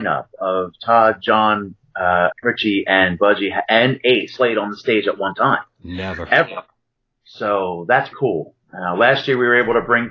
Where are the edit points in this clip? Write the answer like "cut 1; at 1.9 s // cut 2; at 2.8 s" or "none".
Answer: cut 1; at 2.3 s // cut 2; at 4.4 s // cut 3; at 8.1 s

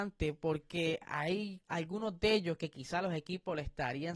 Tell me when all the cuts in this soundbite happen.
cut 1; at 1.6 s

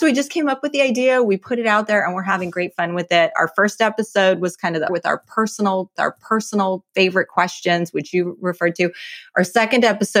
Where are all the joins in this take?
cut 1; at 4.9 s // cut 2; at 6.0 s

